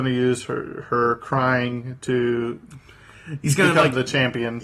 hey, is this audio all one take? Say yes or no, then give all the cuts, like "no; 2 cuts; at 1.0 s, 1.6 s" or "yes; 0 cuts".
yes; 0 cuts